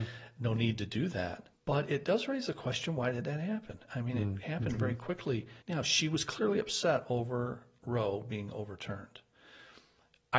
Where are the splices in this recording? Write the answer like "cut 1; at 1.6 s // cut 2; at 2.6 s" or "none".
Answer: cut 1; at 1.5 s // cut 2; at 5.6 s